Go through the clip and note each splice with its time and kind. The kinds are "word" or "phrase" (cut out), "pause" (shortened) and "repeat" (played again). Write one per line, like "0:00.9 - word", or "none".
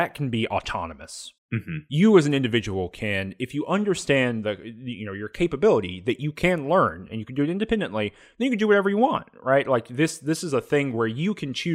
0:01.4 - pause